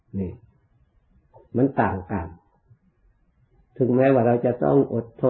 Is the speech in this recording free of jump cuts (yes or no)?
yes